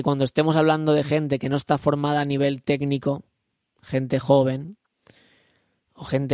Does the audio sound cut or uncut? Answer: uncut